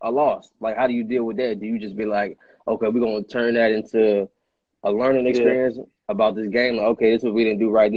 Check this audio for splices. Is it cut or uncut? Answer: uncut